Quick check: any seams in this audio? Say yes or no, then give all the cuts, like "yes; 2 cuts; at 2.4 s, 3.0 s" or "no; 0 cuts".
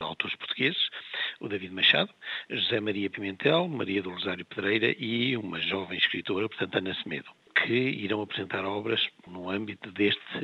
no; 0 cuts